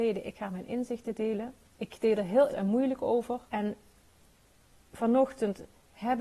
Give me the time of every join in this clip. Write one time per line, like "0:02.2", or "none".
0:01.6
0:02.5
0:03.5